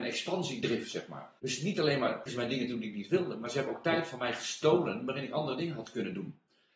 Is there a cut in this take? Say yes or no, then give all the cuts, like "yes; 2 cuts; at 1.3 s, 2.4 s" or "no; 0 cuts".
yes; 2 cuts; at 1.4 s, 2.3 s